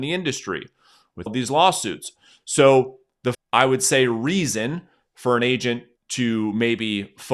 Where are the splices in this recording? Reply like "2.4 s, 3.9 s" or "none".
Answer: 1.3 s, 3.3 s, 6.0 s

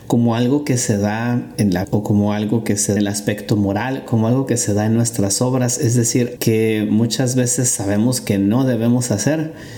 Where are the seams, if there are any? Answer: 1.8 s, 3.0 s, 6.4 s

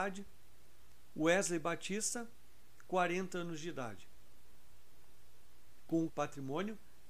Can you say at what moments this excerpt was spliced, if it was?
6.1 s

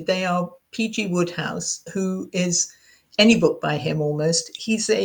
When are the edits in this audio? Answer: none

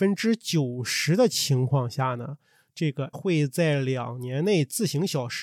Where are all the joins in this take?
3.1 s

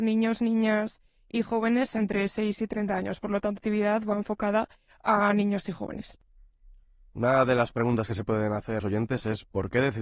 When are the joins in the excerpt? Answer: 3.6 s, 8.8 s

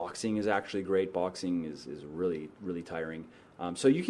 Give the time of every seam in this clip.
none

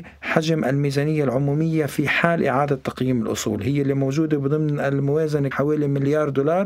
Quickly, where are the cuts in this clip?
5.5 s

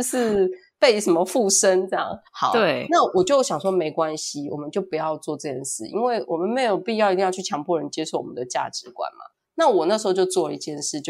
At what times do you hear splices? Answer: 2.3 s

